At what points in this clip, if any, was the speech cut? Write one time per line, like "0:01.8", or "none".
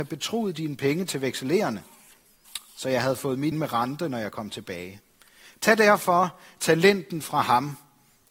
0:03.5